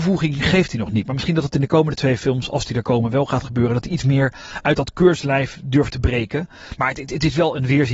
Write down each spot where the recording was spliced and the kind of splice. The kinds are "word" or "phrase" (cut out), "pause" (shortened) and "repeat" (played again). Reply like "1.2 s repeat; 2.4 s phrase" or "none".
none